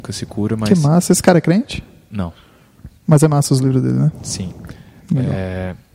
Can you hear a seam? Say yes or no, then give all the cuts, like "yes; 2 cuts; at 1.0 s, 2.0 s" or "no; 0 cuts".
no; 0 cuts